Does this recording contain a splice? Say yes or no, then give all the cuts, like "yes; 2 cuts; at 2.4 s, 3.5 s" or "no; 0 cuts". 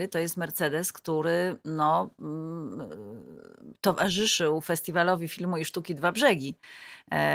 no; 0 cuts